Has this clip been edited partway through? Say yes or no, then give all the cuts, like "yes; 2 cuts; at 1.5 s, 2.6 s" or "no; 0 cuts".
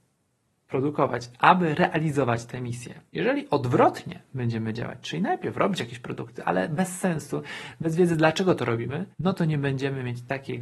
yes; 2 cuts; at 3.1 s, 9.1 s